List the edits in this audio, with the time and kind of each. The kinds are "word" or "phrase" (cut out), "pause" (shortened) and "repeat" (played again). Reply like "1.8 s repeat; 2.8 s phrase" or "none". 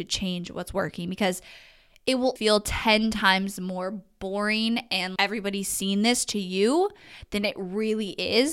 2.4 s word; 5.2 s word